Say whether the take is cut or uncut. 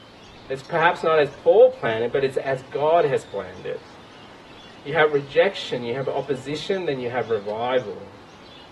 uncut